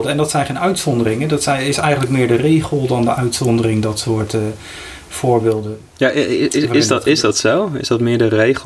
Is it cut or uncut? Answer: uncut